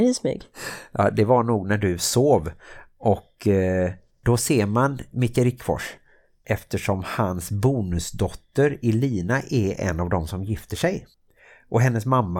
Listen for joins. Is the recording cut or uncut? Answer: uncut